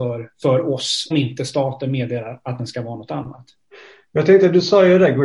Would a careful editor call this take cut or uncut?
cut